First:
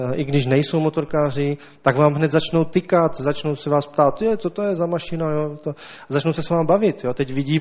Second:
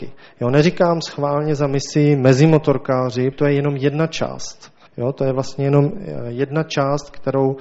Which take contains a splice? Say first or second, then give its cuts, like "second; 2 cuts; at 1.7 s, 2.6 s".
second; 2 cuts; at 3.3 s, 4.9 s